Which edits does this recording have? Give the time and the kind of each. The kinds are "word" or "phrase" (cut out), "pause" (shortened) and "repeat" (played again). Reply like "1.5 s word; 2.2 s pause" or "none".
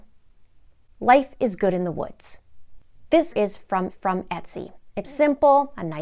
3.3 s word; 3.9 s repeat; 5.0 s word